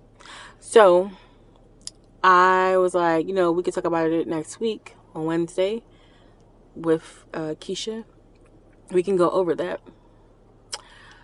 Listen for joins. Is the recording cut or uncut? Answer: uncut